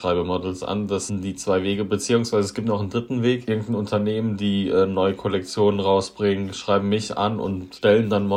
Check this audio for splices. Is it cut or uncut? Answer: uncut